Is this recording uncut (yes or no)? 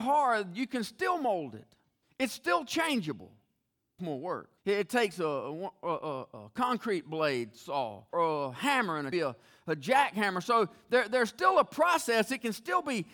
no